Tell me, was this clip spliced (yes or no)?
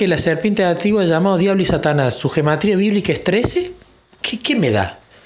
no